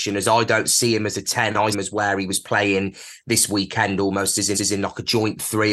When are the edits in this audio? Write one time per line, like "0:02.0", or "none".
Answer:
0:01.7
0:04.5

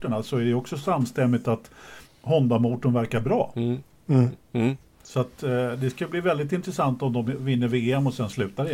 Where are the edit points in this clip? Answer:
none

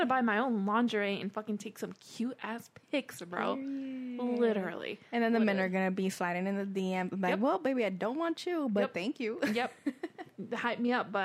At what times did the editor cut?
none

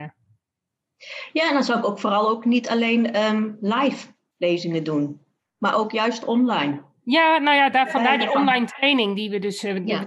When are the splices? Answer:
none

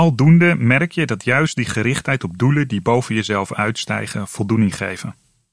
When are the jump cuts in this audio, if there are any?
none

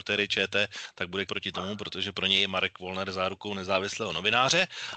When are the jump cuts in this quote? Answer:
0:01.3

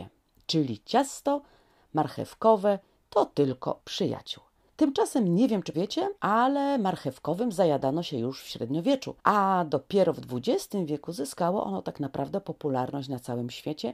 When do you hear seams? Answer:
0:03.8
0:05.7
0:06.2
0:09.2

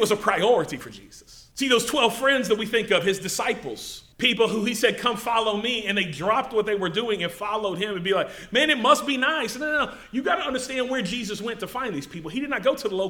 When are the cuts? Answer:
0:01.5
0:04.1

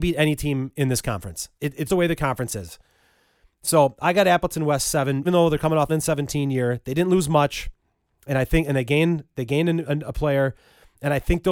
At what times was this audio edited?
0:01.9
0:05.2
0:05.9

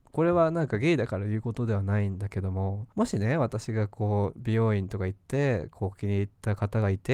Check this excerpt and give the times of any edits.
0:02.9

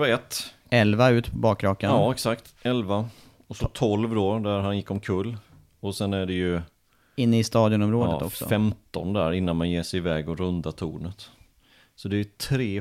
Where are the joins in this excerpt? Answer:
none

